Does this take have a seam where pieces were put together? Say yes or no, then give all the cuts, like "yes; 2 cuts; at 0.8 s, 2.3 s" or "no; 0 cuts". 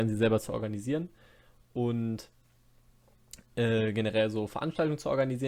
no; 0 cuts